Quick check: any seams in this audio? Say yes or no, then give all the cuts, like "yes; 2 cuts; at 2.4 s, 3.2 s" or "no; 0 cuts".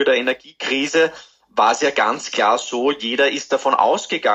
no; 0 cuts